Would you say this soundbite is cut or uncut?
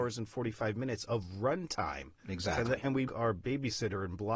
cut